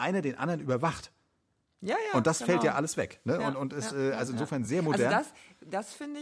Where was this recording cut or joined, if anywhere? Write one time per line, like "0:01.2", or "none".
none